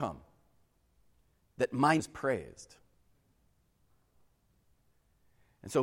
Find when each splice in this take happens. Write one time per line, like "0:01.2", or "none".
0:02.0